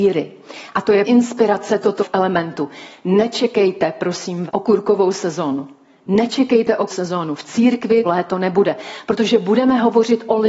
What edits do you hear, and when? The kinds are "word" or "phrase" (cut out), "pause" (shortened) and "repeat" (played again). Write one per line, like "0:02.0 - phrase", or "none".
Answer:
0:01.0 - word
0:02.0 - word
0:04.5 - word
0:06.9 - word
0:08.0 - word